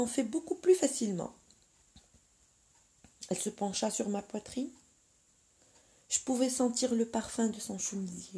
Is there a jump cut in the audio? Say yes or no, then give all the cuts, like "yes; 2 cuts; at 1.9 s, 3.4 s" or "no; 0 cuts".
no; 0 cuts